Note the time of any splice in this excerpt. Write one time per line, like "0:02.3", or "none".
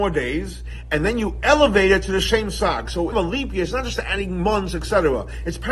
0:03.1